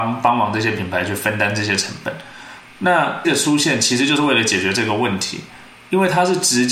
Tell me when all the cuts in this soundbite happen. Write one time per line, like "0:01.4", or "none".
0:03.2